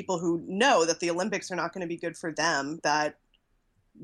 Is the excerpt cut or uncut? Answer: cut